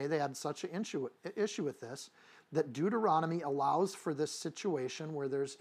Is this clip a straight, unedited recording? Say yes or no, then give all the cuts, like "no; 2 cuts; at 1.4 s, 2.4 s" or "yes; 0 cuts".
yes; 0 cuts